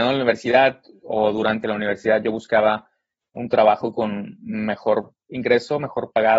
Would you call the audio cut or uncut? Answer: uncut